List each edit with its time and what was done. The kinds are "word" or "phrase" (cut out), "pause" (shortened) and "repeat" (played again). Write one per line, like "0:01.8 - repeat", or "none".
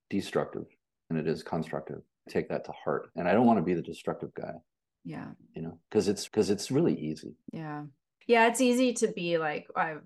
0:01.1 - word
0:02.3 - phrase
0:03.2 - word
0:05.4 - pause
0:06.3 - repeat
0:07.4 - pause